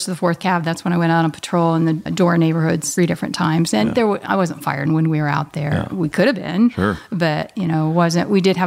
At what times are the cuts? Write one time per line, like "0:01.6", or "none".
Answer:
0:02.1
0:03.0
0:04.3
0:04.9